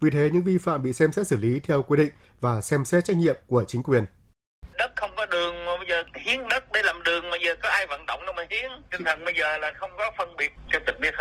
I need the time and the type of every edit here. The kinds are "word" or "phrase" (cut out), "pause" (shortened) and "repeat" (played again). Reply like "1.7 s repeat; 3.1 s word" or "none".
none